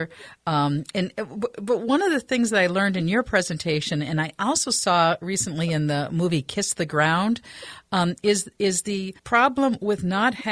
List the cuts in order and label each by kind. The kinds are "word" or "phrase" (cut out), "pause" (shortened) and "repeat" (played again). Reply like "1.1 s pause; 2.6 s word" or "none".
9.2 s pause